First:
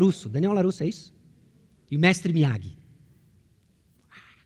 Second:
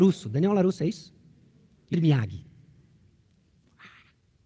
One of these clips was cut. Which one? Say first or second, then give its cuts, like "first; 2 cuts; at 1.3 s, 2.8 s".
second; 1 cut; at 1.9 s